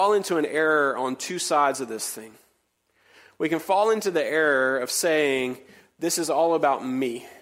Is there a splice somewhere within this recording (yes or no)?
no